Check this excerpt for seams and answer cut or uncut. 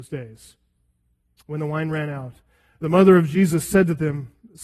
uncut